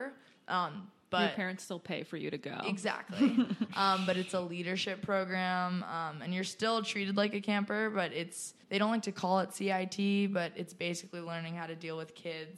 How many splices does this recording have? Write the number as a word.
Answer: one